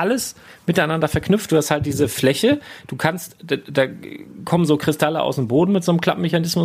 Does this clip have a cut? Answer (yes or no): no